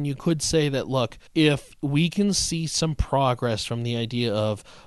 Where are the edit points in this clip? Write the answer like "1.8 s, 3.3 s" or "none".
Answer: 1.3 s

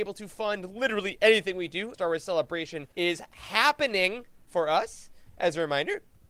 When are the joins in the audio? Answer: 1.9 s, 2.9 s

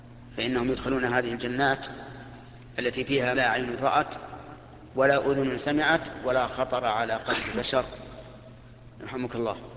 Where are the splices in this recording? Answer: 3.3 s

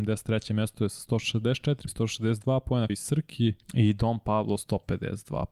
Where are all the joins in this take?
1.9 s, 2.9 s, 3.6 s

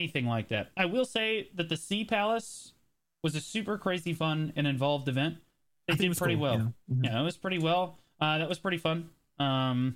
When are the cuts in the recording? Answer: none

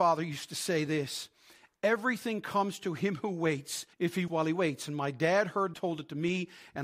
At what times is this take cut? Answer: 3.9 s, 4.3 s, 5.7 s

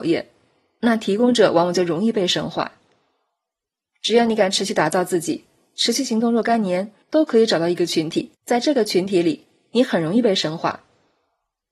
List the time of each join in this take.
7.0 s, 8.3 s

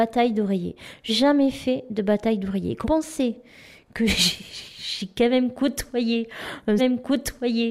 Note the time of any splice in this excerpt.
1.1 s, 2.8 s, 6.8 s

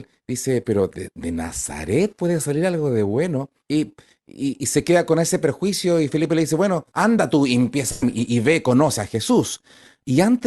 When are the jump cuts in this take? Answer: 3.6 s, 4.6 s, 6.9 s

